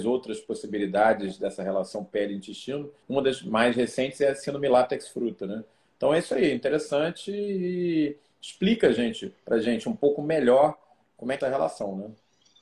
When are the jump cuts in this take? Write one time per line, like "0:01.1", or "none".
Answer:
0:03.0
0:11.4